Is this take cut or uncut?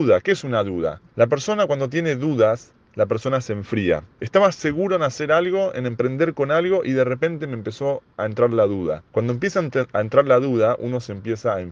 cut